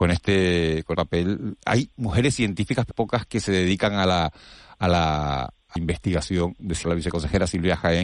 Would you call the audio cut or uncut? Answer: cut